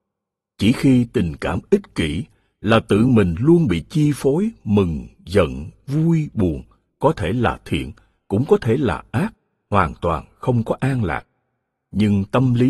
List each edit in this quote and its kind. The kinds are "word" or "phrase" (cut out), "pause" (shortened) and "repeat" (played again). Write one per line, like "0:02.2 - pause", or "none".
none

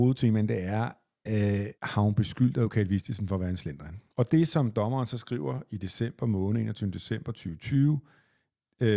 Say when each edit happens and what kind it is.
0:01.7 - pause
0:04.1 - pause

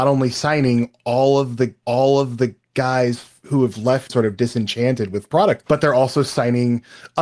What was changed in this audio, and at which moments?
0:01.8 - repeat
0:04.1 - word
0:05.3 - phrase
0:05.6 - word

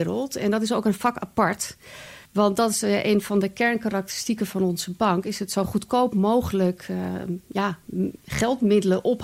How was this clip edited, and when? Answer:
0:02.3 - pause

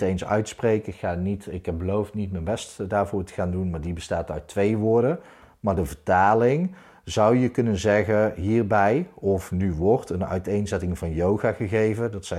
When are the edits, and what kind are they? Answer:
none

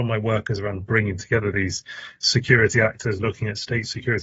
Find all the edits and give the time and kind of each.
none

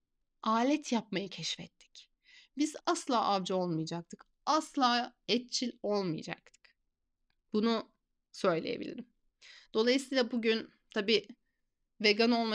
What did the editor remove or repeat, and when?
0:02.8 - phrase
0:07.0 - pause

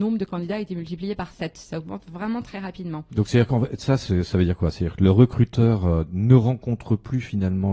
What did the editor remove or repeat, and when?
none

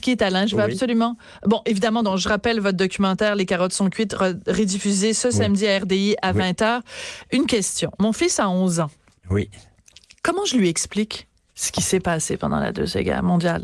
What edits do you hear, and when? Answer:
none

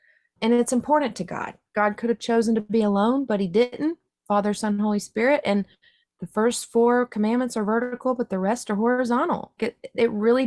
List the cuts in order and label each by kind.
0:09.6 - word

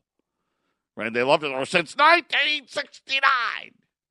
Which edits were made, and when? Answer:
none

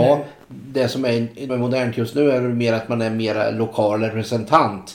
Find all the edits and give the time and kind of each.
0:01.5 - phrase

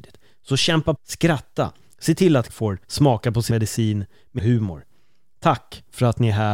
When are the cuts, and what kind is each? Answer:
0:01.0 - word
0:02.5 - word
0:02.8 - pause
0:03.5 - word
0:04.4 - phrase

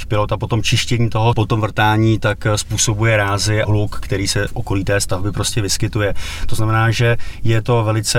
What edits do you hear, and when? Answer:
0:01.3 - word
0:03.6 - word
0:04.5 - word

